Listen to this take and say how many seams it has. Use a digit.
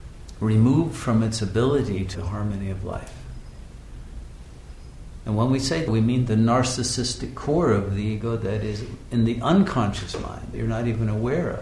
3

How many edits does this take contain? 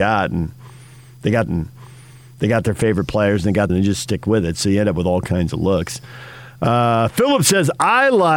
2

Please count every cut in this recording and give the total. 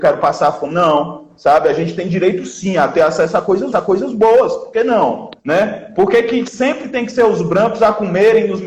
2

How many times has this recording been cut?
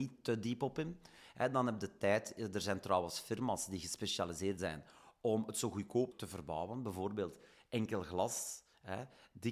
2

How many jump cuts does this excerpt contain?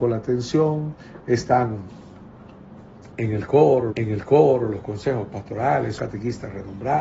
2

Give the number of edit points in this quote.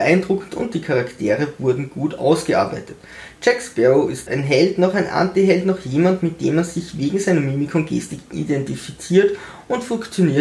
1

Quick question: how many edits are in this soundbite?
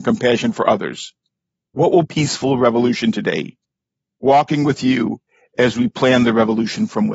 1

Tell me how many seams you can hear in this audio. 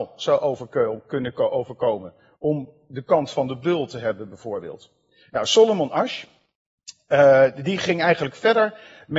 0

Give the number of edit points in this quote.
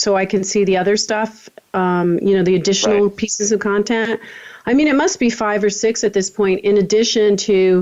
0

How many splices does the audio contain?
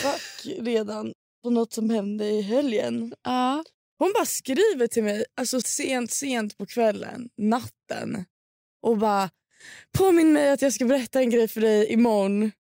1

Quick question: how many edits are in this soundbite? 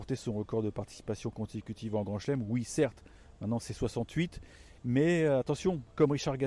1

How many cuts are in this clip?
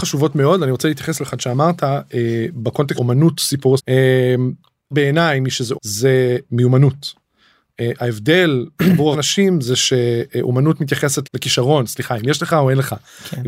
8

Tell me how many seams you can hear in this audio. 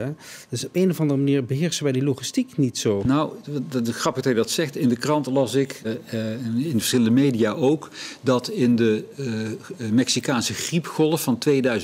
1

